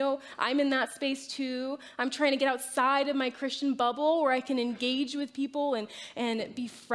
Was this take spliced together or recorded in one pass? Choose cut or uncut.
uncut